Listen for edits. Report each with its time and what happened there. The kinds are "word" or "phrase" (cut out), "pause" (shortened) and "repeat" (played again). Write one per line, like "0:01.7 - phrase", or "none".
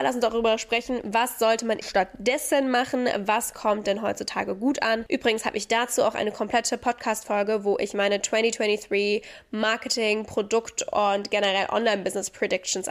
0:01.8 - word